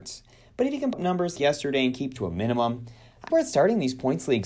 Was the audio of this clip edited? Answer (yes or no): yes